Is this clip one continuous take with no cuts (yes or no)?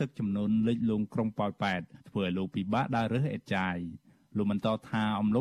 yes